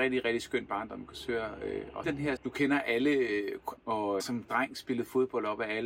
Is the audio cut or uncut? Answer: cut